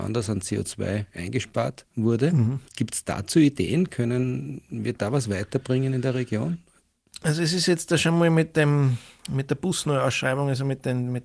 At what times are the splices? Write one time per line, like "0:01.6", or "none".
0:01.9
0:02.7